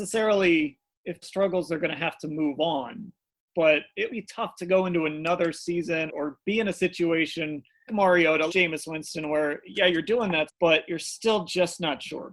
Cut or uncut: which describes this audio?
cut